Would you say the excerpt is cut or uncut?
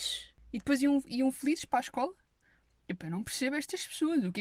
uncut